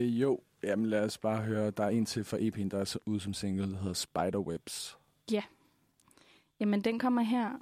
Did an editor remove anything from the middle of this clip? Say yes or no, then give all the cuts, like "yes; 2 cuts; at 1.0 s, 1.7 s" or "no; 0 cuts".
no; 0 cuts